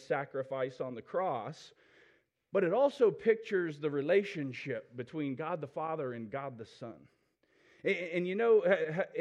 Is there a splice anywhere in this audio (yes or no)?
no